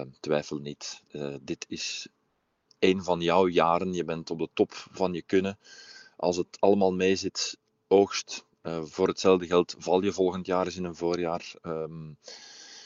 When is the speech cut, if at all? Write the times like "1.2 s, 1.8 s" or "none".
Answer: none